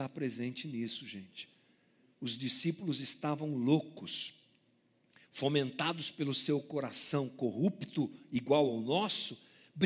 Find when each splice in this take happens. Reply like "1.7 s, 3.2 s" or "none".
none